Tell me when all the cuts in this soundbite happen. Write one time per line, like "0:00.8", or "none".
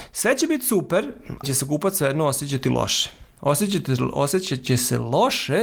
0:01.4

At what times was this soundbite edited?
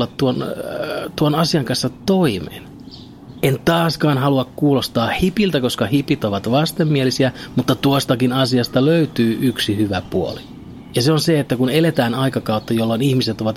none

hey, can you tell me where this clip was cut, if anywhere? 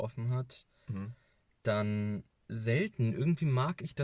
none

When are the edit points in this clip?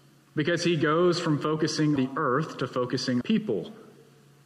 0:02.0
0:03.2

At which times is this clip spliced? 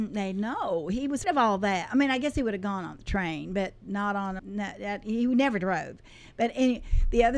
0:01.2
0:04.4

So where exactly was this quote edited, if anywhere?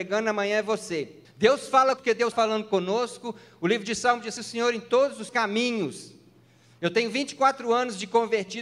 0:01.2
0:02.0
0:02.3
0:04.4
0:05.3

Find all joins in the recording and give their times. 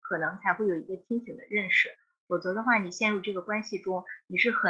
none

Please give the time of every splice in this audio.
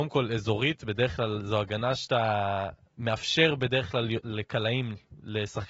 none

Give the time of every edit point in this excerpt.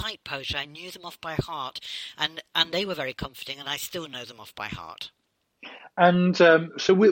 none

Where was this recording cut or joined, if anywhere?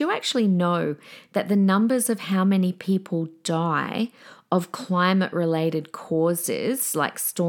none

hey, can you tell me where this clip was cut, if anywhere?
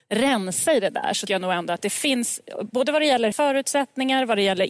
0:01.3
0:03.3

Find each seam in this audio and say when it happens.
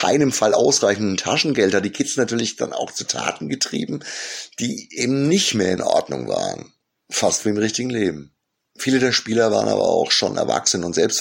none

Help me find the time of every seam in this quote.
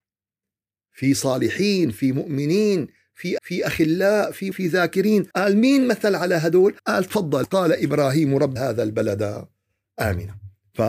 0:03.4
0:04.5
0:05.3
0:06.8
0:07.4
0:08.6

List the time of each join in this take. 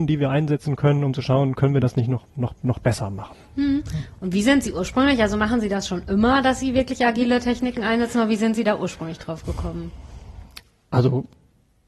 none

